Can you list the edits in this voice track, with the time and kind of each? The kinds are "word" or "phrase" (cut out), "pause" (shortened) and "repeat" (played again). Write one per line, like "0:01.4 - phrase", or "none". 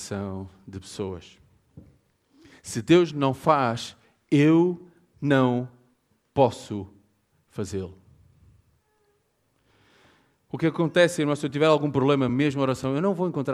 none